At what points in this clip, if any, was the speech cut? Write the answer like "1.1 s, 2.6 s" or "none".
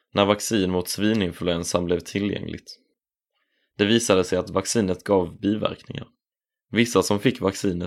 none